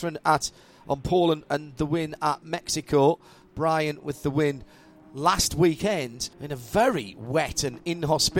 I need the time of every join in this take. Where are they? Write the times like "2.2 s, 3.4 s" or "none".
6.3 s